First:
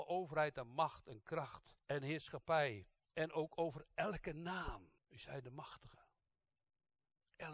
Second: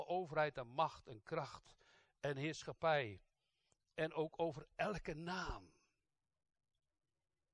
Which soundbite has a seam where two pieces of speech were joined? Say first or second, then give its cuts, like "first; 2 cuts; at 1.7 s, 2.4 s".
first; 3 cuts; at 1.8 s, 3.0 s, 5.0 s